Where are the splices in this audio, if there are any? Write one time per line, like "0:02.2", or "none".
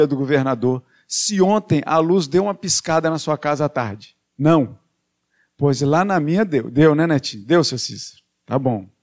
0:04.2